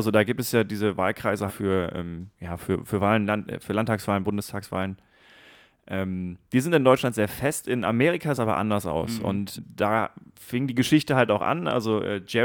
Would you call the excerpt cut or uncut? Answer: cut